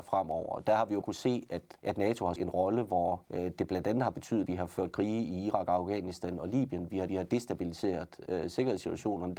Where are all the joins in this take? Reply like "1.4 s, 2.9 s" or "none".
1.0 s, 1.8 s, 2.4 s, 3.2 s, 4.5 s, 7.1 s